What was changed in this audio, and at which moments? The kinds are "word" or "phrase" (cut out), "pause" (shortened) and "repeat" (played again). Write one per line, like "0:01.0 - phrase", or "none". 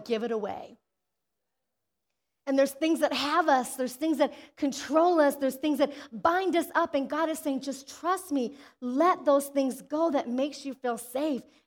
none